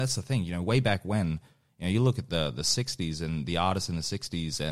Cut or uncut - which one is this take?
uncut